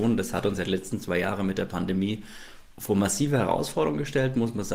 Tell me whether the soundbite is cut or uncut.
uncut